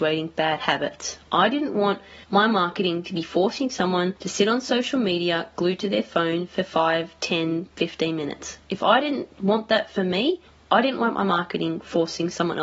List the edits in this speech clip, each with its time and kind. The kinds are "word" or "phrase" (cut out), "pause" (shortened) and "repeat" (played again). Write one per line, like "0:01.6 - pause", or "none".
0:02.2 - pause
0:04.2 - pause
0:10.5 - pause